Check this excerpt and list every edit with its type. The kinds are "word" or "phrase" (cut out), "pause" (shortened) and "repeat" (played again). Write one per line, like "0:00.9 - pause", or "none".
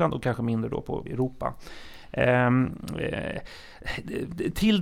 0:01.1 - word